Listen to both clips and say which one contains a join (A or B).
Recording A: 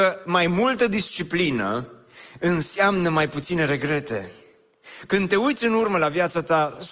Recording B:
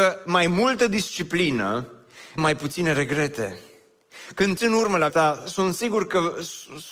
B